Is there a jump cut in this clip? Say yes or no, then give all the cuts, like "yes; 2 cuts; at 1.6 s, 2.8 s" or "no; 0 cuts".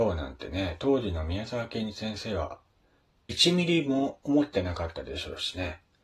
no; 0 cuts